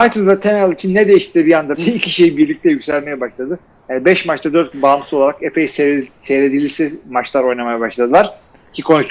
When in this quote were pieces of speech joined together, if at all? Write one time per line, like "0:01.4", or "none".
0:01.7
0:04.7